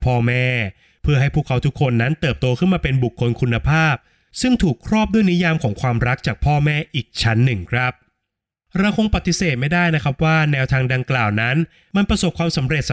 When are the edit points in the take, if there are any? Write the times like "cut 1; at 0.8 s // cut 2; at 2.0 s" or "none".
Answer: none